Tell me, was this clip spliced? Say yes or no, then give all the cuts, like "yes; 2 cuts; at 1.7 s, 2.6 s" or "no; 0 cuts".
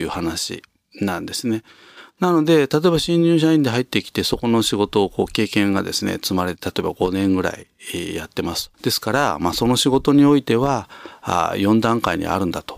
yes; 1 cut; at 8.7 s